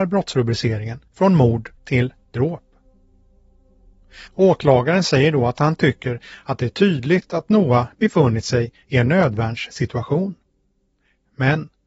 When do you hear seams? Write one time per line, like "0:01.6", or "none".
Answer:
0:01.1
0:01.8